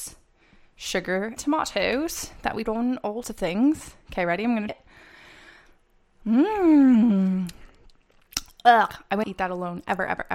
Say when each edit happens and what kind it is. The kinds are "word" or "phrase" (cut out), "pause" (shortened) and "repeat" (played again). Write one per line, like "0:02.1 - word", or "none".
0:01.4 - word
0:02.7 - word
0:03.2 - word
0:04.7 - word
0:09.2 - word